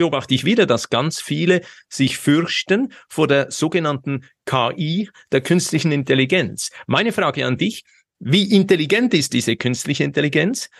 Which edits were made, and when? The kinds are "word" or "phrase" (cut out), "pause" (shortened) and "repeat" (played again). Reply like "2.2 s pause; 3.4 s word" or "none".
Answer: none